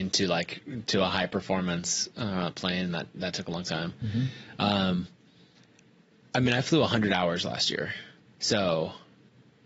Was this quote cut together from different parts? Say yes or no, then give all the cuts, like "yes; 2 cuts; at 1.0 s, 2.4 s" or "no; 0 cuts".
no; 0 cuts